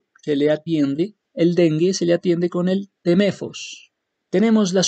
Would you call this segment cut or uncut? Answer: cut